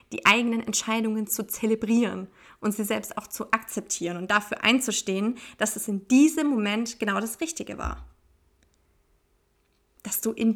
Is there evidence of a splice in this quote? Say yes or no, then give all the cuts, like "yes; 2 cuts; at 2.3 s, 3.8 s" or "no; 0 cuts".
no; 0 cuts